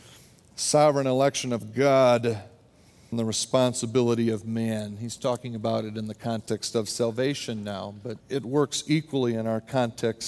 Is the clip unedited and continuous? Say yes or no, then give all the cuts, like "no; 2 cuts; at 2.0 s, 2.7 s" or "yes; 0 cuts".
no; 2 cuts; at 3.1 s, 8.2 s